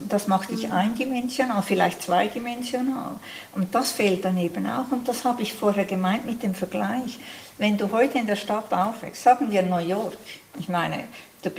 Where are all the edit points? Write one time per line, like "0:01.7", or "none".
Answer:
none